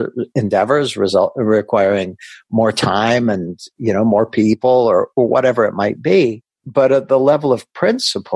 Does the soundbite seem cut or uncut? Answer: cut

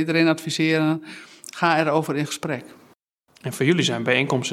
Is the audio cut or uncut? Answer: uncut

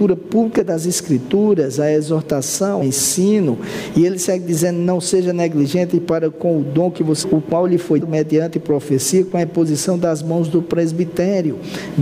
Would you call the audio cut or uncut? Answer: cut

